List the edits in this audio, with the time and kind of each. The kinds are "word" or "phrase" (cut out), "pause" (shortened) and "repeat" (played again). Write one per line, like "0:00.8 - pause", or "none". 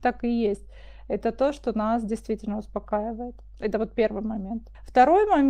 none